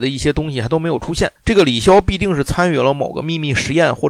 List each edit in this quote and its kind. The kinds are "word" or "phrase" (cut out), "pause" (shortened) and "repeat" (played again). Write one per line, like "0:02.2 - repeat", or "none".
0:01.4 - pause